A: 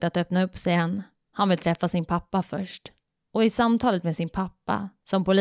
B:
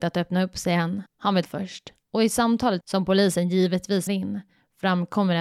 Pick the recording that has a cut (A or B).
B